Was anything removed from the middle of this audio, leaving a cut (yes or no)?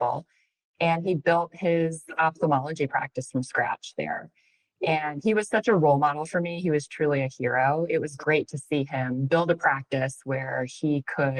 no